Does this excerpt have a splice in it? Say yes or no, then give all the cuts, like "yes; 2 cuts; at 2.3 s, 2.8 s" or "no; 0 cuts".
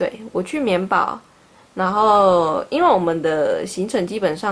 no; 0 cuts